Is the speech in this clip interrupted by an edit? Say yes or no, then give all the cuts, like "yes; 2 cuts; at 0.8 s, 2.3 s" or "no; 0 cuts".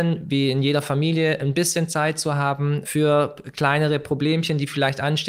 no; 0 cuts